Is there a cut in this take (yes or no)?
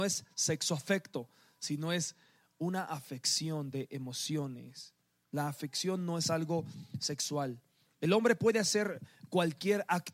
no